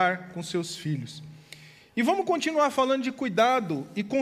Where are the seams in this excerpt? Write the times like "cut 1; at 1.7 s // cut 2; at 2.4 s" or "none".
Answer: none